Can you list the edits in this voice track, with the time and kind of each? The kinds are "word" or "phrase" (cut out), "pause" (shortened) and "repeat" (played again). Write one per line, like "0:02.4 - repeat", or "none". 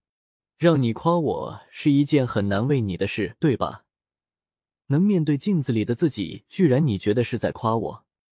none